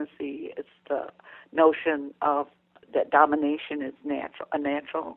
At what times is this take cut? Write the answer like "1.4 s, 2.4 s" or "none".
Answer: none

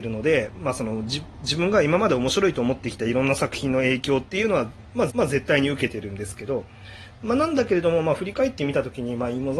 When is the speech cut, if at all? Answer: 5.1 s

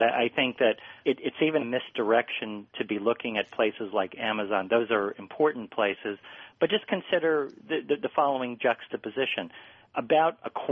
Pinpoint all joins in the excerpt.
1.0 s, 1.6 s

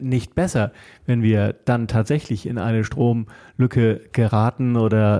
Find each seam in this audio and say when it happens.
none

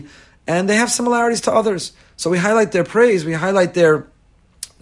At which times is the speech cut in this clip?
none

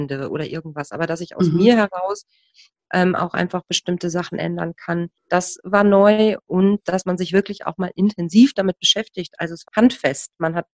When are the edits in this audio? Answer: 5.2 s, 9.7 s

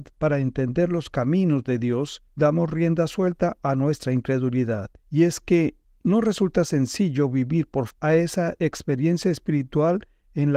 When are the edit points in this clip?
2.3 s, 5.0 s, 5.8 s, 7.9 s

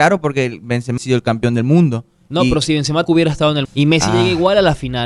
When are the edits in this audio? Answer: 1.0 s, 3.1 s, 3.6 s

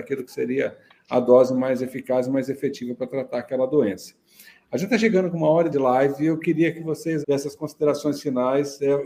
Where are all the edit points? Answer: 5.7 s, 7.2 s

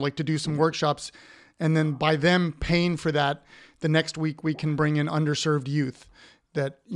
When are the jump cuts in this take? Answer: none

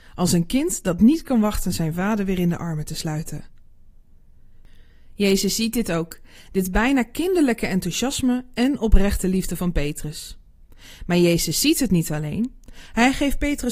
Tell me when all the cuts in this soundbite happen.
none

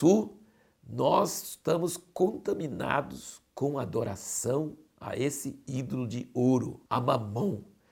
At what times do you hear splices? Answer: 6.9 s

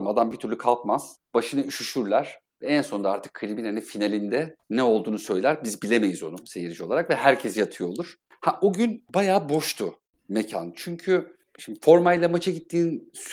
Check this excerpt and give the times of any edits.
4.6 s, 9.1 s

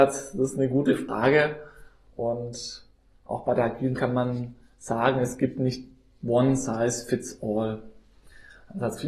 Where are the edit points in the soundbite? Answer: 4.0 s, 6.2 s

